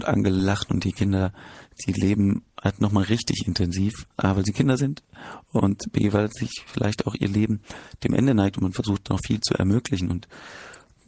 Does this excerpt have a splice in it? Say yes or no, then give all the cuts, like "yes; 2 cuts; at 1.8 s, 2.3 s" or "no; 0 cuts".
yes; 1 cut; at 4.1 s